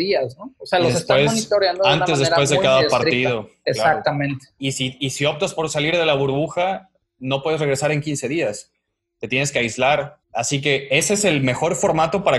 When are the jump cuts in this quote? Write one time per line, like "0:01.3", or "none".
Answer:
0:10.2